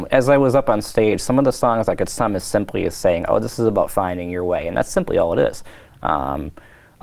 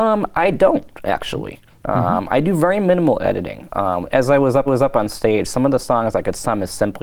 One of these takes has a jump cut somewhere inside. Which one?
second; 1 cut; at 4.7 s

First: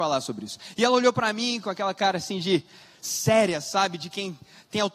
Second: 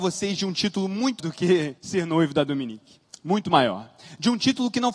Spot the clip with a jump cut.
second; 3 cuts; at 1.2 s, 1.8 s, 3.1 s

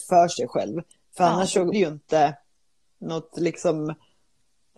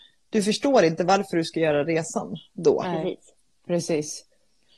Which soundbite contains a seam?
first; 1 cut; at 1.7 s

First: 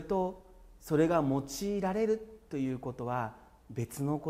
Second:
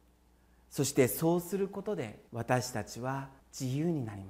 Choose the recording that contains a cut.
second; 2 cuts; at 2.3 s, 3.4 s

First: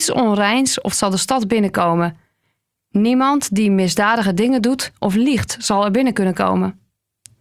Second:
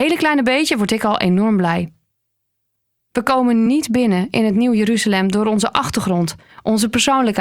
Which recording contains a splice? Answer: first; 1 cut; at 0.9 s

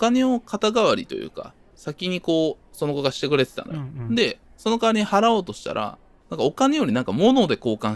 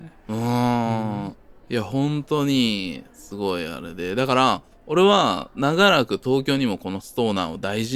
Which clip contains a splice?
second; 1 cut; at 1.6 s

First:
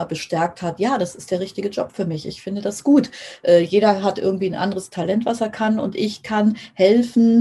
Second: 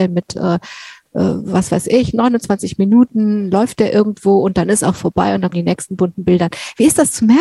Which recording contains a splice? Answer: second; 1 cut; at 5.5 s

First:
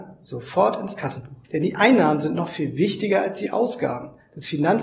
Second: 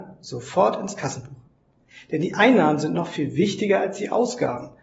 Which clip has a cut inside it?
first; 1 cut; at 1.4 s

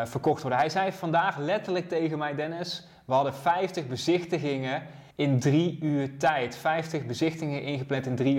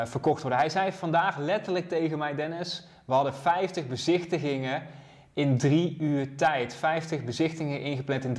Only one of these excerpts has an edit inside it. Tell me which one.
first; 1 cut; at 5.1 s

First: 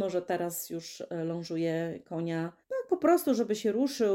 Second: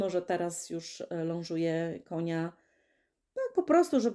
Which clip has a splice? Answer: first; 1 cut; at 2.6 s

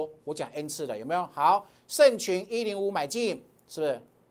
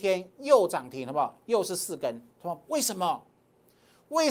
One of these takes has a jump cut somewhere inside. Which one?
second; 1 cut; at 2.3 s

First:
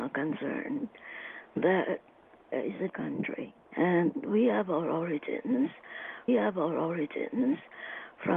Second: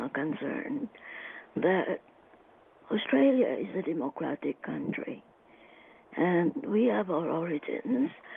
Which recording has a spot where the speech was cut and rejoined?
first; 4 cuts; at 2.5 s, 2.9 s, 3.6 s, 6.3 s

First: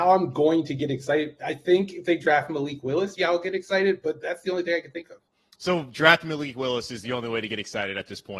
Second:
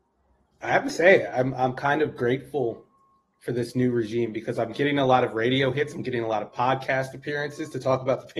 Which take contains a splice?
first; 2 cuts; at 3.2 s, 5.3 s

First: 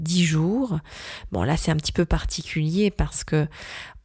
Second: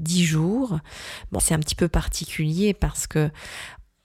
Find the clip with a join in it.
second; 1 cut; at 1.4 s

